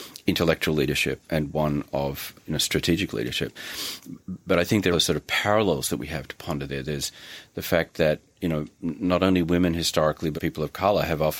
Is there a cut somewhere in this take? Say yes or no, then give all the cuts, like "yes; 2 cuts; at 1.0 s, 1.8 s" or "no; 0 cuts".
yes; 3 cuts; at 1.3 s, 4.9 s, 10.4 s